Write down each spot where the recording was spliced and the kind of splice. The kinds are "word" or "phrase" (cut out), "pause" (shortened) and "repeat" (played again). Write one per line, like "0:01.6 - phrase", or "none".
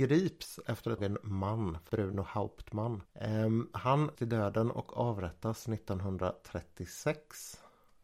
0:01.0 - word
0:01.9 - phrase
0:04.1 - word